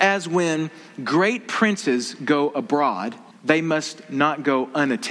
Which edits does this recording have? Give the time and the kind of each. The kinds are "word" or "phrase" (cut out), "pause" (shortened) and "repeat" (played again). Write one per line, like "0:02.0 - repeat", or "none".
0:03.3 - pause